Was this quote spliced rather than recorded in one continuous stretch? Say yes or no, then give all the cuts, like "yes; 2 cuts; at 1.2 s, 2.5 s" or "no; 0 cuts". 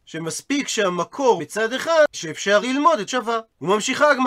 yes; 4 cuts; at 1.4 s, 2.1 s, 2.6 s, 3.1 s